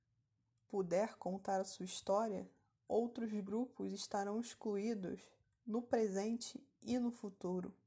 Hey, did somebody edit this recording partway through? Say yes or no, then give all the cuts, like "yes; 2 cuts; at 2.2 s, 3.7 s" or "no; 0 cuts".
no; 0 cuts